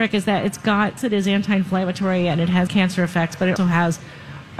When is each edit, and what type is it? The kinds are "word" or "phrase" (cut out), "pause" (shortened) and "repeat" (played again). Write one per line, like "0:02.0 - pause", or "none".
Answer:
0:01.0 - word
0:02.7 - word
0:03.6 - word